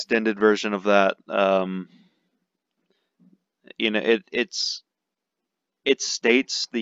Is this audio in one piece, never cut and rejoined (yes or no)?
yes